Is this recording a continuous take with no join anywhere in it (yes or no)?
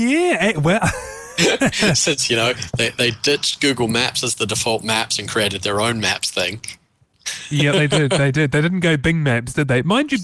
yes